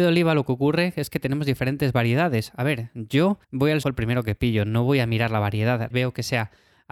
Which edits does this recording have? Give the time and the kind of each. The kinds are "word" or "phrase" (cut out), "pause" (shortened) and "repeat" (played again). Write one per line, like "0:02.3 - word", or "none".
0:03.4 - pause
0:03.8 - phrase
0:05.9 - word